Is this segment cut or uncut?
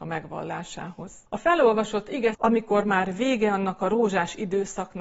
cut